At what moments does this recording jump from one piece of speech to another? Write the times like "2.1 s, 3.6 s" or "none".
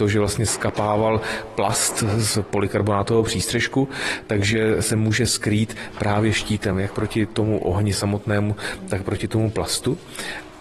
none